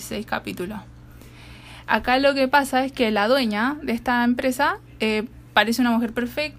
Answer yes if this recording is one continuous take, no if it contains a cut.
yes